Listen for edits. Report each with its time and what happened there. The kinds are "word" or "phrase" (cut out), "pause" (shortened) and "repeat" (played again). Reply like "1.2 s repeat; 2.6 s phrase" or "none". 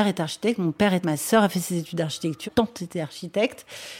1.0 s word; 2.5 s word